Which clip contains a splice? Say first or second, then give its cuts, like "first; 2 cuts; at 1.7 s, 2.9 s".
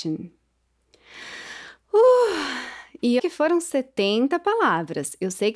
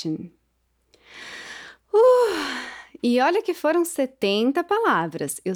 first; 1 cut; at 3.2 s